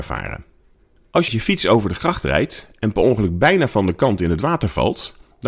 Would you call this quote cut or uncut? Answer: cut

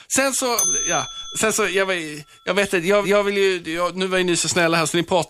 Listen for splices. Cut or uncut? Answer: cut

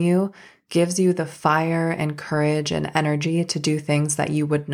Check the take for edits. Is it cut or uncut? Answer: uncut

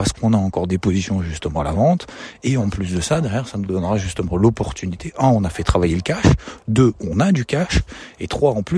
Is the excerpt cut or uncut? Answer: uncut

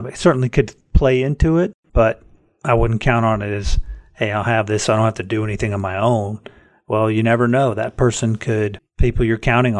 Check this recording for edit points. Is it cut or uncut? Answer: uncut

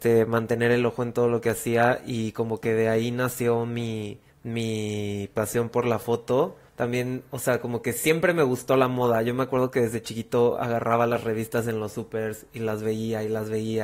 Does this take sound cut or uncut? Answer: cut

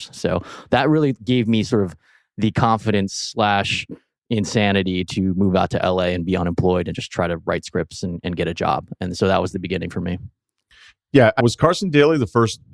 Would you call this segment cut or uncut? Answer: cut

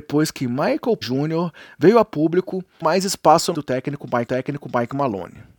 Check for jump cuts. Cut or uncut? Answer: cut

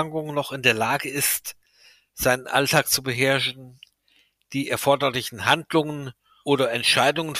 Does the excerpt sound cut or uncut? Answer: uncut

